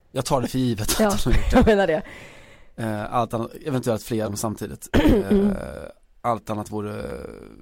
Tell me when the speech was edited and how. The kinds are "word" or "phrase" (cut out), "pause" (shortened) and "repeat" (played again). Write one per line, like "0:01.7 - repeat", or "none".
0:04.2 - word